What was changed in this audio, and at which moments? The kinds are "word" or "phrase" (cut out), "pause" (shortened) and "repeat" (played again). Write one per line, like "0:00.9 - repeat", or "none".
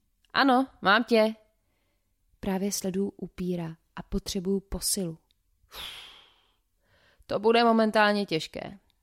none